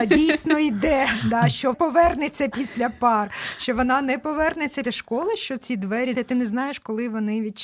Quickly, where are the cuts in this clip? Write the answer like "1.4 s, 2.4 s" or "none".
1.7 s, 4.8 s, 6.1 s